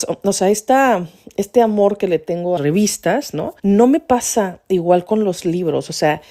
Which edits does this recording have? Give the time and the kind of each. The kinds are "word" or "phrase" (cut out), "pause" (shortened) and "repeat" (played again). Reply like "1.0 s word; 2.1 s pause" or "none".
2.6 s phrase; 3.6 s pause